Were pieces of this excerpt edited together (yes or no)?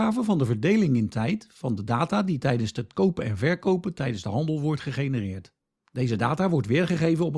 no